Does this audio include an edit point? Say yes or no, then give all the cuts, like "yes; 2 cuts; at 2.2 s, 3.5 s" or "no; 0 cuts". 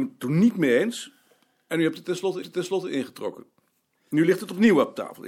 yes; 1 cut; at 2.4 s